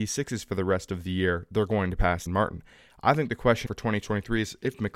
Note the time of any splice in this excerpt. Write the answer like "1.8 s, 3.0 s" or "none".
2.3 s, 3.7 s